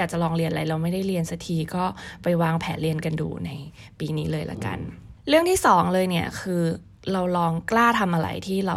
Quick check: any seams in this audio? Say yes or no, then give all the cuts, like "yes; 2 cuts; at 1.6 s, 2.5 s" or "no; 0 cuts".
yes; 1 cut; at 5.2 s